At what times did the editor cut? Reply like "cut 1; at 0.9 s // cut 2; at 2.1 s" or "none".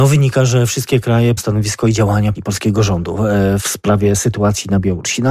cut 1; at 1.4 s // cut 2; at 2.3 s // cut 3; at 3.6 s

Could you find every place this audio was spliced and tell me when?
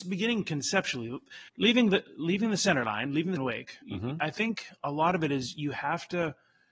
cut 1; at 1.5 s // cut 2; at 3.4 s // cut 3; at 3.8 s

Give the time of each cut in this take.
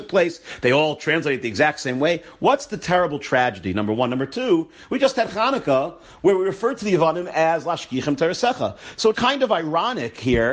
cut 1; at 9.1 s

